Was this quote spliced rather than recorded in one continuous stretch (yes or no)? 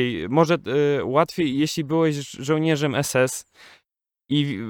no